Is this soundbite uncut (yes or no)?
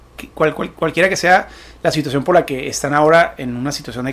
yes